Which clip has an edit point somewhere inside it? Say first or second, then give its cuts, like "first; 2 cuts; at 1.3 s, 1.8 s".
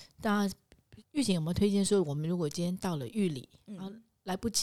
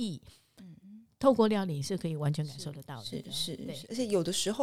first; 1 cut; at 1.0 s